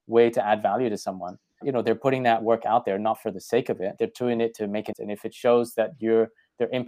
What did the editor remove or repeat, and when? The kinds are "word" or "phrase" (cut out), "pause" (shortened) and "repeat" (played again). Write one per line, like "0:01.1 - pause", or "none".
0:01.6 - word
0:04.0 - word
0:04.9 - word